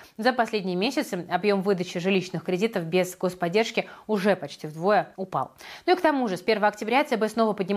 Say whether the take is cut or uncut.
cut